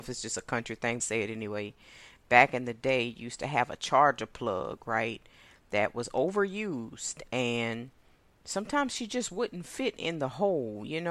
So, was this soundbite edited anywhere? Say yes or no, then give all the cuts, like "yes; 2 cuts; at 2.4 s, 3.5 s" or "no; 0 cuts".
yes; 1 cut; at 1.0 s